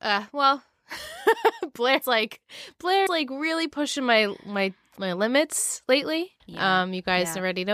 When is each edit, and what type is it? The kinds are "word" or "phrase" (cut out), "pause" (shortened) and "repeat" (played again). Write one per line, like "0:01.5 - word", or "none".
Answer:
0:02.0 - word
0:03.1 - word
0:06.4 - pause